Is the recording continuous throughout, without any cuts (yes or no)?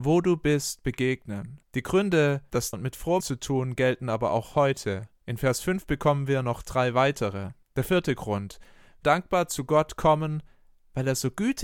no